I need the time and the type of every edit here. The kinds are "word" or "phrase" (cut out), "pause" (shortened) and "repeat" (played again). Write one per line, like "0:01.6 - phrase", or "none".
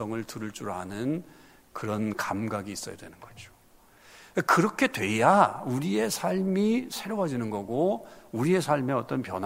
none